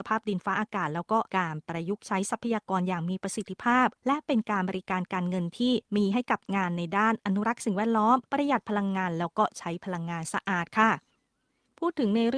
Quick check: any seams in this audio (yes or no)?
yes